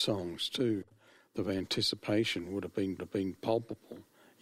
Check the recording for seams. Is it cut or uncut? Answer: cut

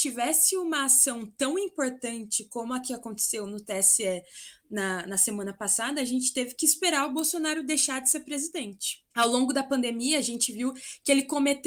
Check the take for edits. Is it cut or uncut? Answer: cut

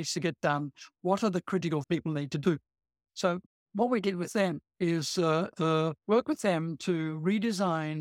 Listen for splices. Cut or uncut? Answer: cut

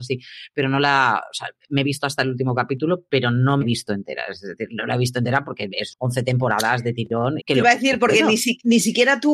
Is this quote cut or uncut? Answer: cut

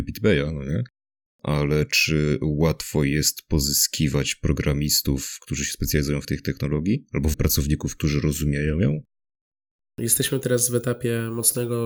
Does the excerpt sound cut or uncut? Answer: cut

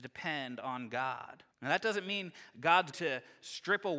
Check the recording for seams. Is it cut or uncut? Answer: cut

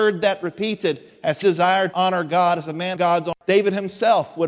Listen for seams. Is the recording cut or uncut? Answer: cut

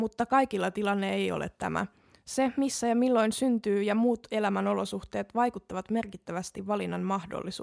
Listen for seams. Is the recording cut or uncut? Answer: uncut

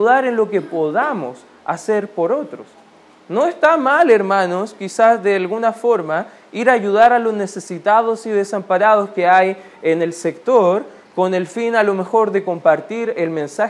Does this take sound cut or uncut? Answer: uncut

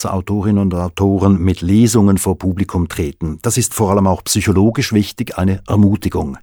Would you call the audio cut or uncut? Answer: uncut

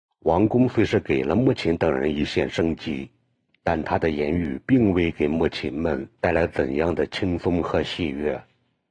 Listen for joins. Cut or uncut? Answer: uncut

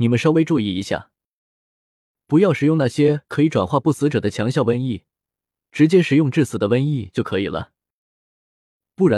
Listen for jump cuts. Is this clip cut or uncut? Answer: uncut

